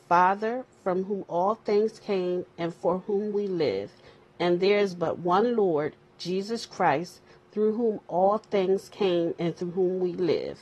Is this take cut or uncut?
uncut